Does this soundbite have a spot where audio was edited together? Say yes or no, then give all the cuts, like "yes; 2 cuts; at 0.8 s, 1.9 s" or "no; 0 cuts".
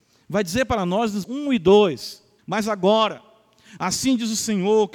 yes; 2 cuts; at 1.2 s, 2.4 s